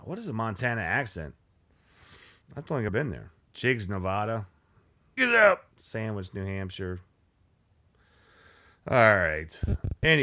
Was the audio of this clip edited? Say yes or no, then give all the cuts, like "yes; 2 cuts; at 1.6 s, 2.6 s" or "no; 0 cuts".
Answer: yes; 5 cuts; at 2.4 s, 2.9 s, 3.4 s, 5.2 s, 5.7 s